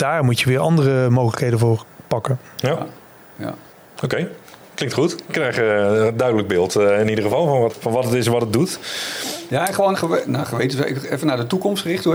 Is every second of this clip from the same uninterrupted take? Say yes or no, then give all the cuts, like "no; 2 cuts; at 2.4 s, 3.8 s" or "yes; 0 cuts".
no; 3 cuts; at 3.7 s, 7.7 s, 9.9 s